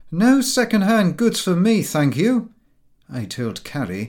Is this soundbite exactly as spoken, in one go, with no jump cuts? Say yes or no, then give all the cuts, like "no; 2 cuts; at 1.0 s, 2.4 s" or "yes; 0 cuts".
yes; 0 cuts